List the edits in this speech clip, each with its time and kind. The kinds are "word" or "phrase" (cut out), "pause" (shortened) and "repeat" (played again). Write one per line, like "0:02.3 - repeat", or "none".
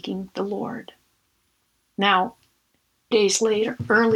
0:03.1 - word